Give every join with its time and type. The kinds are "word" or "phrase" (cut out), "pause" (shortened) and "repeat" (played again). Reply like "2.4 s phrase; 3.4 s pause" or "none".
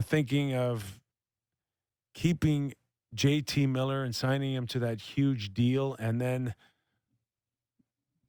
none

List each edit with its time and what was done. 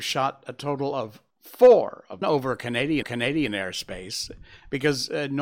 1.3 s pause; 2.2 s phrase; 3.0 s repeat

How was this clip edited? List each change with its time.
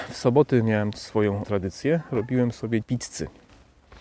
0.9 s word; 1.4 s word; 2.8 s word

